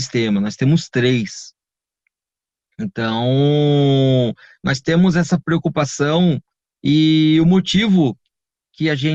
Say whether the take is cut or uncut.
uncut